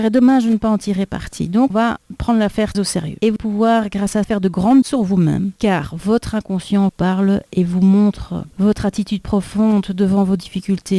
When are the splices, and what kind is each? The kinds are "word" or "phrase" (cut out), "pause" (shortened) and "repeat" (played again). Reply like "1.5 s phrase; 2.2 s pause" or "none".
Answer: 1.7 s word; 2.7 s word; 3.4 s word; 4.2 s word; 4.8 s word; 6.9 s word